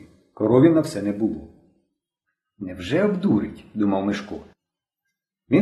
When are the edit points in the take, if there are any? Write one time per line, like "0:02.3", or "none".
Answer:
none